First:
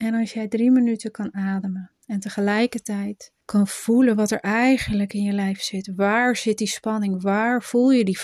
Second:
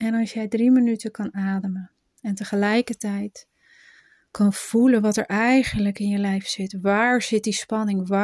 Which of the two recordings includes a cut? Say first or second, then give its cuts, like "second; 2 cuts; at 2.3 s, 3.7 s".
first; 2 cuts; at 2.0 s, 3.4 s